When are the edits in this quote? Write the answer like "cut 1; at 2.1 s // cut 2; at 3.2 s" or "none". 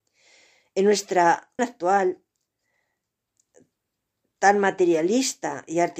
cut 1; at 1.6 s